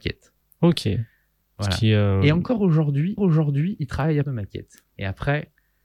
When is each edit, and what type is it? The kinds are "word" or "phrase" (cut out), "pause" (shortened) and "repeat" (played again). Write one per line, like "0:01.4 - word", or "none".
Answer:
0:03.2 - repeat
0:04.2 - word
0:04.9 - pause